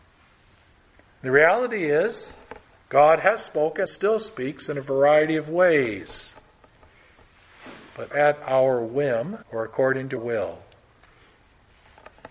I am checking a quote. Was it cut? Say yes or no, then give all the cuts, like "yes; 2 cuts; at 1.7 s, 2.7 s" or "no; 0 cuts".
yes; 5 cuts; at 2.7 s, 3.9 s, 8.1 s, 9.4 s, 10.2 s